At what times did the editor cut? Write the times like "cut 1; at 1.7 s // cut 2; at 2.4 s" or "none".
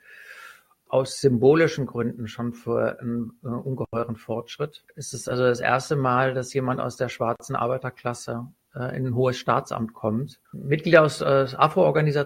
cut 1; at 4.9 s // cut 2; at 10.4 s